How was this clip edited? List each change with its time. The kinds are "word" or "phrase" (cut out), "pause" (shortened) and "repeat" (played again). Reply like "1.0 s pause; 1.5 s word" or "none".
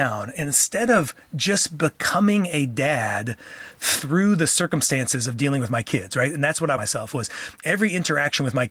6.8 s phrase